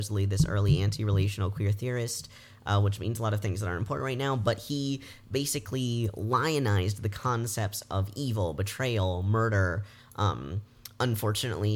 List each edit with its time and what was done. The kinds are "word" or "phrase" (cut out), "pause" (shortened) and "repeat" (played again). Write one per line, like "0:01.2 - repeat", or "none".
none